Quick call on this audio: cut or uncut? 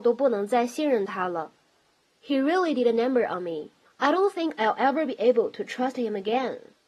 cut